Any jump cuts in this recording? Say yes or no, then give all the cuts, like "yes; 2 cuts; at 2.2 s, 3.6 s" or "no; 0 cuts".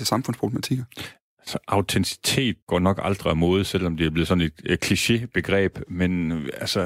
yes; 1 cut; at 2.6 s